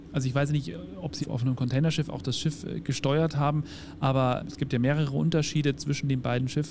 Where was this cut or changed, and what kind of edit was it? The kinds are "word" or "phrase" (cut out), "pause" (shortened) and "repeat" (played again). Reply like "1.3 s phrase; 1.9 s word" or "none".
1.2 s word; 4.4 s word